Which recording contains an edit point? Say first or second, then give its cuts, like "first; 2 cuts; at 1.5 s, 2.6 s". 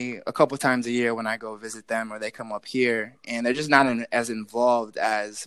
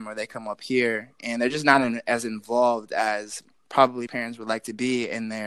second; 1 cut; at 4.1 s